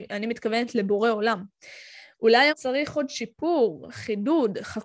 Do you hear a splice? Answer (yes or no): yes